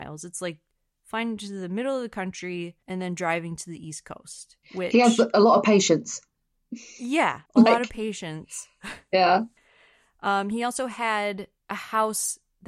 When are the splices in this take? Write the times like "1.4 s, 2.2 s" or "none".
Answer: 2.8 s, 4.6 s, 7.5 s, 9.6 s, 11.6 s